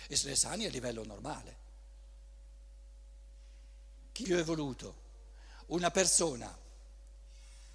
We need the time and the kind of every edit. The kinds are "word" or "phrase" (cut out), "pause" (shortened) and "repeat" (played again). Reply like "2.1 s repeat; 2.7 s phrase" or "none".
4.2 s word